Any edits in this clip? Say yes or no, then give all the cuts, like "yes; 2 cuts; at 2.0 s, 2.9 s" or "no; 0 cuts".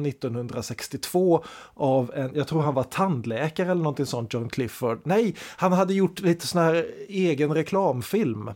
no; 0 cuts